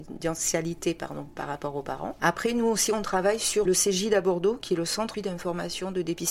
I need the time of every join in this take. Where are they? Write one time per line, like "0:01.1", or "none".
0:03.7
0:05.1